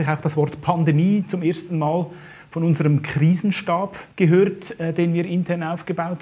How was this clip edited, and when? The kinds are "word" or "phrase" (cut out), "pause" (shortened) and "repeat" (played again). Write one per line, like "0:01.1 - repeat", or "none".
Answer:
0:04.1 - pause